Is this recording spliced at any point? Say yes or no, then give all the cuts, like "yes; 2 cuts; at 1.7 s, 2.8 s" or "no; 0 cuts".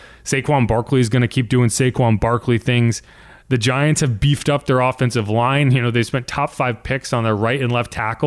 no; 0 cuts